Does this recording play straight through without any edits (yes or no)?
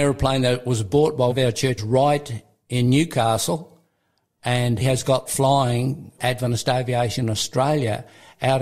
no